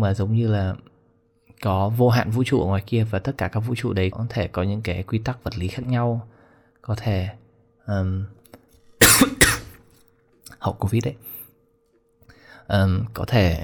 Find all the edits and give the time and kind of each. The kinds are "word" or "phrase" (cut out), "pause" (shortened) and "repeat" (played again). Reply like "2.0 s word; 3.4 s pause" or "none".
4.1 s word